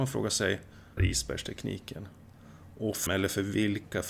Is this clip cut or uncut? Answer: cut